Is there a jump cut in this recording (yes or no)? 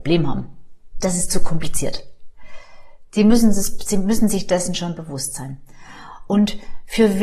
no